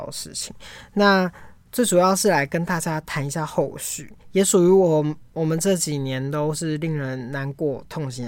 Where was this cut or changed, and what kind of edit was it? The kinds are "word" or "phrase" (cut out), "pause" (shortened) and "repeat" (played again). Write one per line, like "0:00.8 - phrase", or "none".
0:04.2 - pause

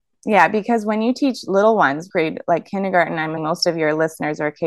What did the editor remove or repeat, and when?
0:02.1 - phrase
0:03.4 - word

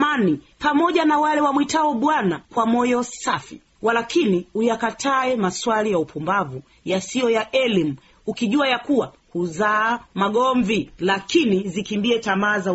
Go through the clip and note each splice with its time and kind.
0:02.4 - pause

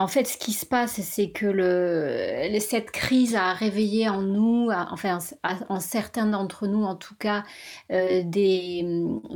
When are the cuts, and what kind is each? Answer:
none

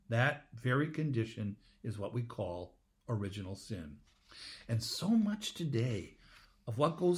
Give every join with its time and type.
none

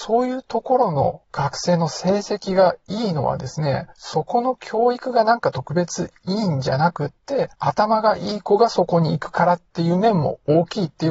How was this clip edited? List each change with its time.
0:01.2 - pause
0:03.9 - pause
0:07.5 - pause

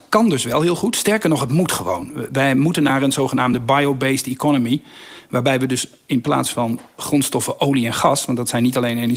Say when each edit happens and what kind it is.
none

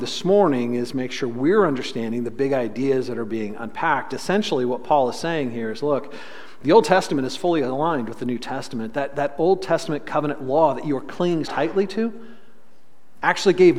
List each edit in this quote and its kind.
0:11.5 - word

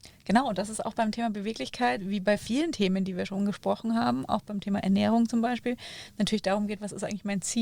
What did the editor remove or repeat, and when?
none

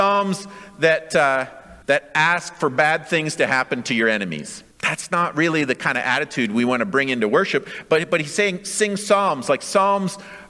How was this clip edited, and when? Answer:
0:01.8 - pause
0:04.7 - pause

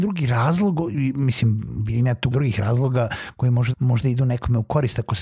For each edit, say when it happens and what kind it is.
0:02.3 - word
0:03.7 - word

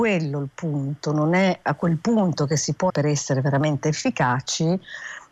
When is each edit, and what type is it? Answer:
0:02.9 - word

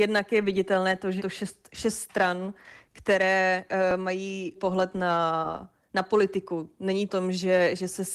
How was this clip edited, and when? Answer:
0:01.2 - word
0:04.5 - phrase
0:07.1 - phrase

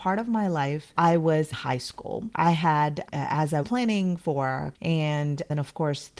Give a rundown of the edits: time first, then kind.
0:00.9 - word
0:01.5 - word
0:03.6 - word
0:04.7 - word

